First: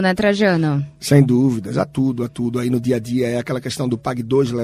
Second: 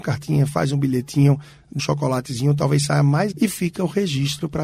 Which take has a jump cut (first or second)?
second